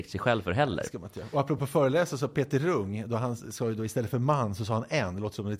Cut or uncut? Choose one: uncut